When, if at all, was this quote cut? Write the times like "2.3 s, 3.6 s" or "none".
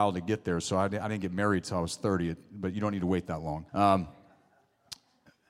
3.7 s